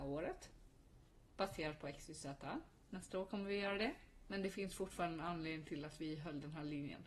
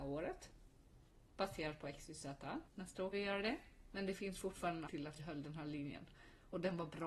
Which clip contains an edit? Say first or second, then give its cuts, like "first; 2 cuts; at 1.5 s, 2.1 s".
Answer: second; 4 cuts; at 2.7 s, 3.1 s, 4.9 s, 5.2 s